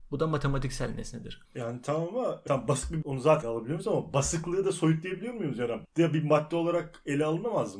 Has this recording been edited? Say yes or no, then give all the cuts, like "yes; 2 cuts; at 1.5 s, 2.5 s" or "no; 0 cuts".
yes; 5 cuts; at 1.4 s, 2.5 s, 3.0 s, 3.4 s, 5.8 s